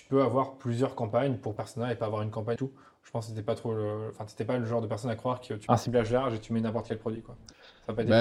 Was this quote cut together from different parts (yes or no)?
yes